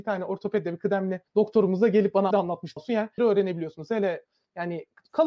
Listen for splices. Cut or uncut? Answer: cut